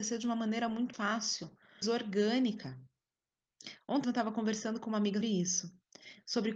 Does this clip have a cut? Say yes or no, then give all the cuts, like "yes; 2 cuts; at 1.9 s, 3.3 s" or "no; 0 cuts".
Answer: yes; 4 cuts; at 0.9 s, 1.8 s, 4.0 s, 5.2 s